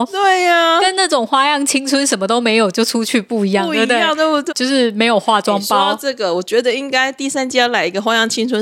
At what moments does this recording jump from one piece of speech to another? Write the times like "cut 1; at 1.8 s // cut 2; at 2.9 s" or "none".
cut 1; at 4.5 s

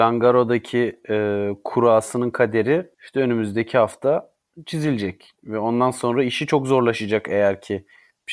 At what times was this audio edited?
cut 1; at 2.9 s

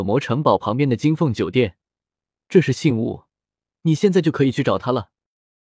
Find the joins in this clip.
none

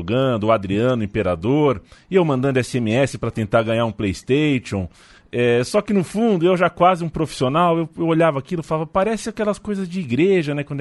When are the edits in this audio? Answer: none

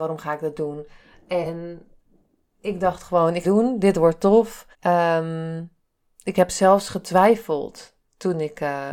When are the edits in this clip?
cut 1; at 3.4 s // cut 2; at 4.7 s

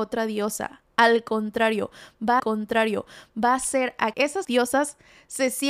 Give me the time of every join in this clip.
cut 1; at 2.4 s // cut 2; at 4.1 s // cut 3; at 4.4 s

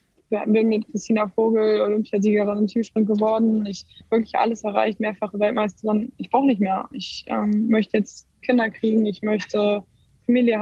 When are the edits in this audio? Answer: cut 1; at 4.0 s // cut 2; at 8.3 s

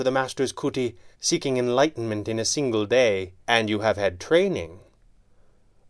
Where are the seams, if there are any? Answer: cut 1; at 1.1 s // cut 2; at 3.4 s

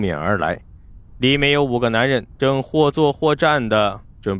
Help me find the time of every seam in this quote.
cut 1; at 2.3 s

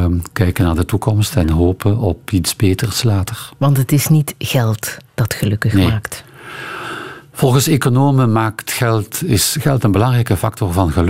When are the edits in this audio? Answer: none

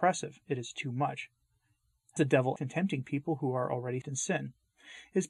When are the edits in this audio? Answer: cut 1; at 2.2 s // cut 2; at 2.6 s // cut 3; at 4.0 s

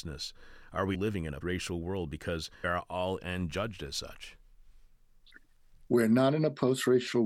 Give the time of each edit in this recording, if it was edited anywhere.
cut 1; at 0.9 s // cut 2; at 1.4 s // cut 3; at 2.6 s // cut 4; at 3.2 s

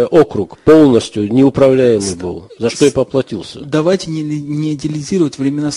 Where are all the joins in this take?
none

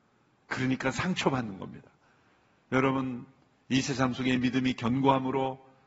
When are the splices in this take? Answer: none

